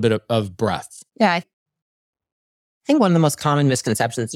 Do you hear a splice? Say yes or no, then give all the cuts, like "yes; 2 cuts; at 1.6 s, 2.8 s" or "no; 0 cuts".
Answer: yes; 2 cuts; at 1.1 s, 1.4 s